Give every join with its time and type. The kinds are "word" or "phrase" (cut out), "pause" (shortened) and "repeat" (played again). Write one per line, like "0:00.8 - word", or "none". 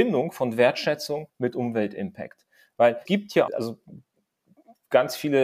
0:01.3 - pause
0:03.1 - word
0:03.5 - word

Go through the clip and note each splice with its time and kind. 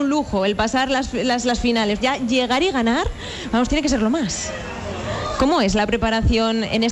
0:01.4 - word
0:02.0 - word

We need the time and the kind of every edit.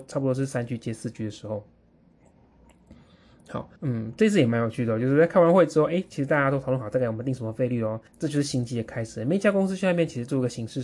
0:03.8 - pause
0:08.1 - pause

